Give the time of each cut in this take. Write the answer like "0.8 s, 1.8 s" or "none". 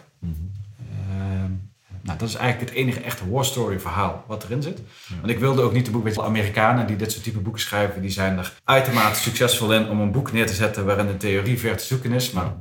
6.2 s, 8.6 s